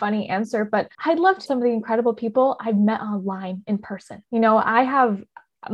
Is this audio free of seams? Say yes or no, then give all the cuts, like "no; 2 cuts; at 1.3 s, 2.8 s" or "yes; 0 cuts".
no; 3 cuts; at 0.9 s, 1.5 s, 4.3 s